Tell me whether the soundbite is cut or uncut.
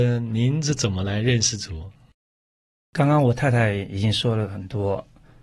uncut